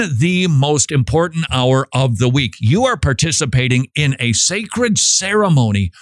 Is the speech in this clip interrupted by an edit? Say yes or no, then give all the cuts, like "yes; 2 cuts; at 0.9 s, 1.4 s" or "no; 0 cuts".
no; 0 cuts